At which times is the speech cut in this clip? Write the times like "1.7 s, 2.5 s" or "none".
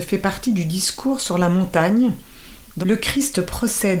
2.8 s